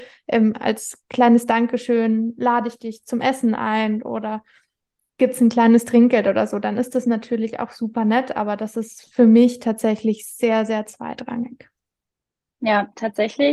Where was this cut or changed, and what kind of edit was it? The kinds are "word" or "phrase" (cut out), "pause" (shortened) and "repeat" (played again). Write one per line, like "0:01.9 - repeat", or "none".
none